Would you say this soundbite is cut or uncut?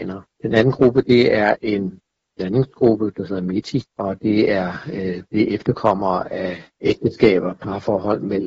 uncut